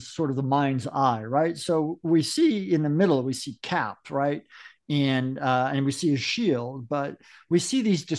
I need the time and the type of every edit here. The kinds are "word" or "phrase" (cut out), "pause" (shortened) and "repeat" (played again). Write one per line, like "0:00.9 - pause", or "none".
none